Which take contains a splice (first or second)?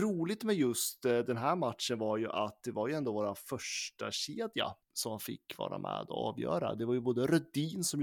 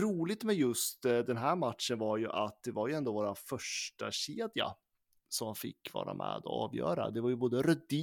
first